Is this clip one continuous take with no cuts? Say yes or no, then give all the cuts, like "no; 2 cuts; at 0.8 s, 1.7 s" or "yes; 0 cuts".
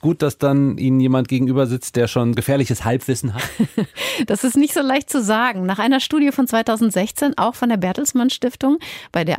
no; 1 cut; at 2.3 s